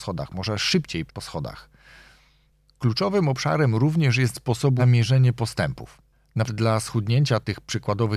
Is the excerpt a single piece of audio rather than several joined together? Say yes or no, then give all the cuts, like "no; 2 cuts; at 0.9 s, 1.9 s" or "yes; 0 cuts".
no; 4 cuts; at 1.1 s, 4.3 s, 4.8 s, 6.5 s